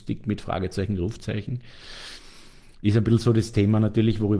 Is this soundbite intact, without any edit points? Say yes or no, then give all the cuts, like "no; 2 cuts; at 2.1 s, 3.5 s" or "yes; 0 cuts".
yes; 0 cuts